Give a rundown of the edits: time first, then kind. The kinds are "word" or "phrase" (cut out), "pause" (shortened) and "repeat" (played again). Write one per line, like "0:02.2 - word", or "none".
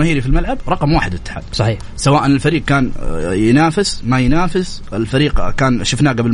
none